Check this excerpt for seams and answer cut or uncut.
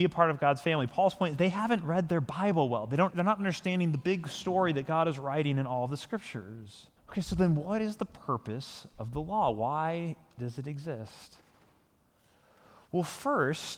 cut